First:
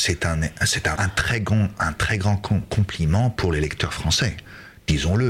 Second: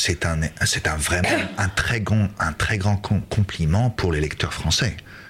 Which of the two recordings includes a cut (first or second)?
first